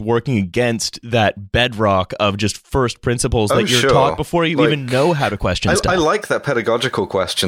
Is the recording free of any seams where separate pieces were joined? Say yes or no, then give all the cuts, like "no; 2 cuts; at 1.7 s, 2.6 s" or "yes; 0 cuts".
yes; 0 cuts